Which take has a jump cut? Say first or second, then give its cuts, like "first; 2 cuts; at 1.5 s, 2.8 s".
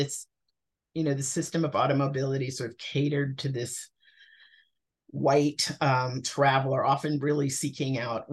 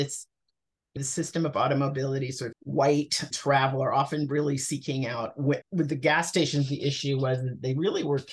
second; 4 cuts; at 1.0 s, 2.5 s, 3.3 s, 5.6 s